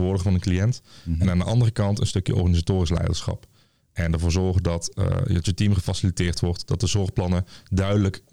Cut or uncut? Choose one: uncut